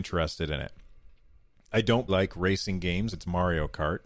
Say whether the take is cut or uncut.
cut